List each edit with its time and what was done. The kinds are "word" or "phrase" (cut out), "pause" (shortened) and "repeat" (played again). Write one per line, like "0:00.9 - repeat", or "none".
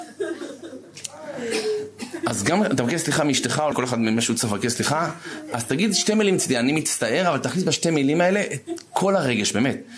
0:03.7 - phrase